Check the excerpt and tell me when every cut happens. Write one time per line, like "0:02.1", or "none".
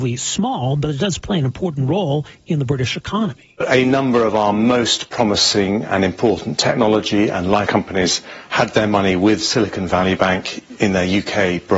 0:07.7